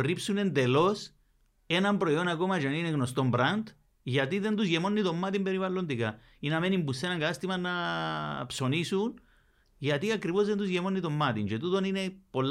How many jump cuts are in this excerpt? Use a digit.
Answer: 0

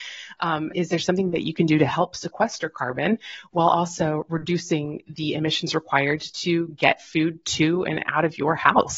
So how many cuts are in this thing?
0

